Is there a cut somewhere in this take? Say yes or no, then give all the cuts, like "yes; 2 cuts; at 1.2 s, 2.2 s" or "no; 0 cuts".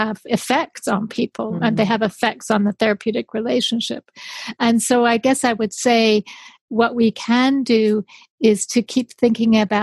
no; 0 cuts